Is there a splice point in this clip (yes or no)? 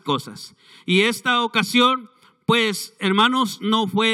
no